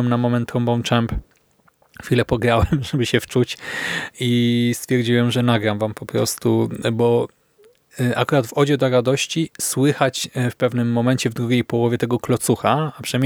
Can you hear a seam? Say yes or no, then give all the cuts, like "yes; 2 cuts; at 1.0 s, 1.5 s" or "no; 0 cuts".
no; 0 cuts